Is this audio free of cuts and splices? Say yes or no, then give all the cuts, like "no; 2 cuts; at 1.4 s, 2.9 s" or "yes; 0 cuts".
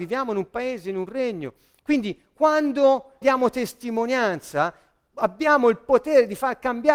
no; 1 cut; at 3.2 s